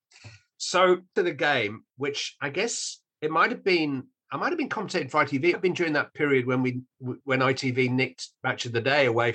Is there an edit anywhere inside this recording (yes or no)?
yes